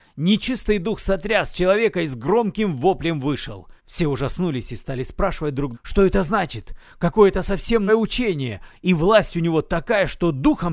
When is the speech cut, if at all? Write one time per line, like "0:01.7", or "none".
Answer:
0:03.8
0:05.7
0:07.9